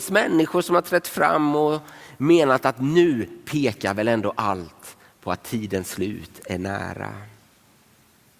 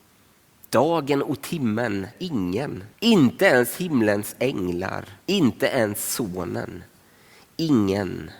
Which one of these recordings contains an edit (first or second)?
second